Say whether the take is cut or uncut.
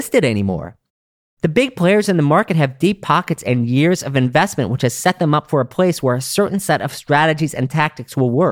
uncut